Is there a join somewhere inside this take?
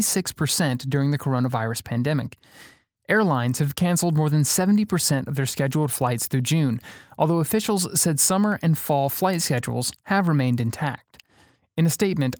no; 0 cuts

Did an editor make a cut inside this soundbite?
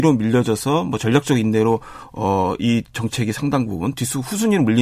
no; 0 cuts

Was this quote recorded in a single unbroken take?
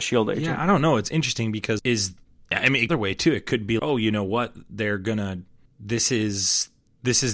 no; 5 cuts; at 1.8 s, 2.2 s, 2.9 s, 3.8 s, 5.7 s

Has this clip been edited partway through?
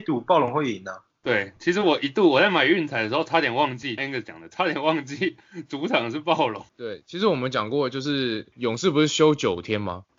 yes; 2 cuts; at 4.0 s, 6.7 s

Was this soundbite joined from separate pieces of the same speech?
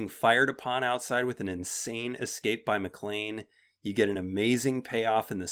no; 0 cuts

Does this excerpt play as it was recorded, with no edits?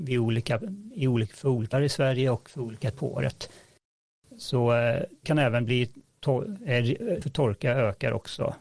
no; 4 cuts; at 1.7 s, 2.9 s, 5.2 s, 7.2 s

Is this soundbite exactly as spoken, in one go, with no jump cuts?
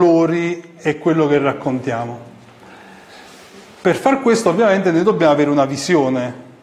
yes; 0 cuts

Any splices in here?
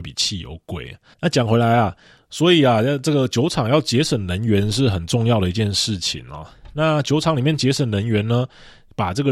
no; 0 cuts

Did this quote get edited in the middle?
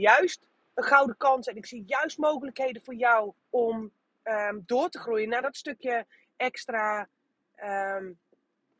yes; 2 cuts; at 3.4 s, 5.4 s

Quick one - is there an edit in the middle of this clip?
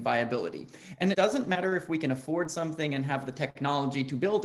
yes; 1 cut; at 1.1 s

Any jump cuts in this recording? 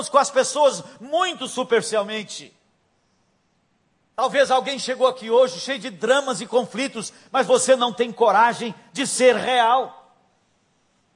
no; 0 cuts

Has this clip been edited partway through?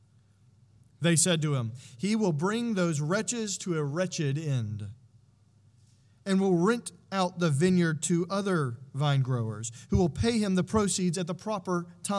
no; 0 cuts

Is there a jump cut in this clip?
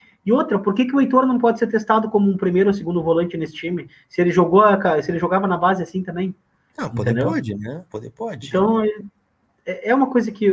no; 0 cuts

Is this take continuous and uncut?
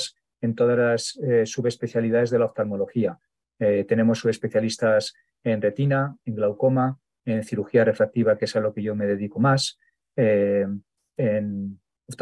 yes; 0 cuts

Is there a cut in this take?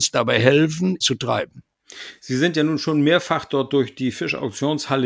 yes; 1 cut; at 1.0 s

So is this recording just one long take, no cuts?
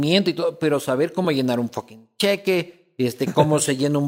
yes; 0 cuts

